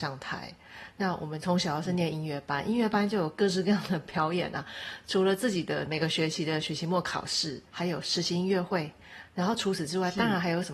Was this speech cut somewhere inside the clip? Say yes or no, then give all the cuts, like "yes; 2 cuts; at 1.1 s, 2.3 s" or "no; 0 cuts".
yes; 1 cut; at 7.7 s